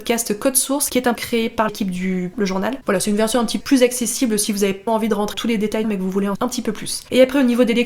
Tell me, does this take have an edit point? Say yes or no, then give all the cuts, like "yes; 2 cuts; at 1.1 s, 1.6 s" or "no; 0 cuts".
yes; 8 cuts; at 1.2 s, 1.7 s, 2.3 s, 3.6 s, 4.9 s, 5.3 s, 5.8 s, 6.3 s